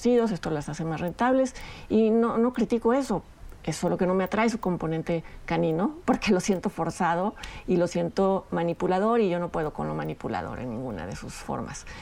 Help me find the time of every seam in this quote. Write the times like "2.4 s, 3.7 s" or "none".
none